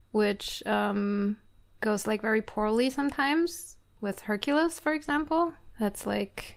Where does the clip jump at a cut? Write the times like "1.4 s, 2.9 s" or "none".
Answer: none

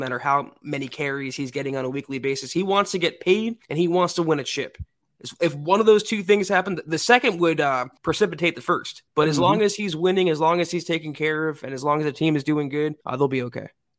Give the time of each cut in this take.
3.6 s, 8.0 s, 9.1 s, 13.0 s

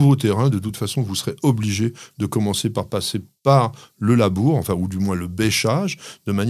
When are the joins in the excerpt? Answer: none

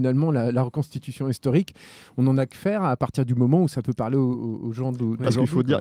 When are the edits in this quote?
none

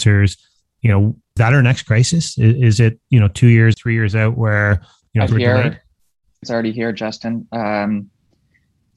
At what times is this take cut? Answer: 1.4 s, 3.7 s, 5.3 s, 6.4 s

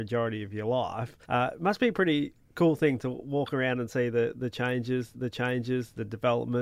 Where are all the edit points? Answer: 1.2 s, 5.1 s

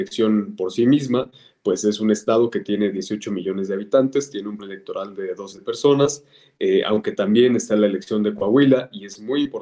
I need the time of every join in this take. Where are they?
4.6 s, 5.5 s

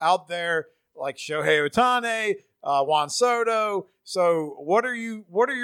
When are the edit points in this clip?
none

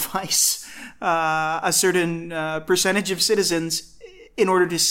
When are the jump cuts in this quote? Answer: none

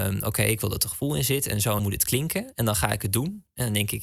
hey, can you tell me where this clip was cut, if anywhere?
1.8 s

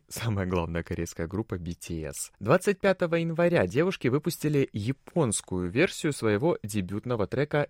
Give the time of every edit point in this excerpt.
2.3 s

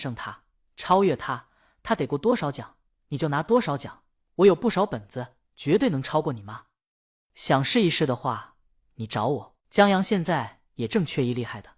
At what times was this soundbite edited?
9.6 s

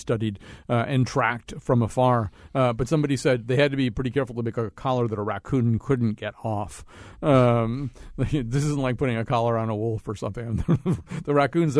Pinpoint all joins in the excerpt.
none

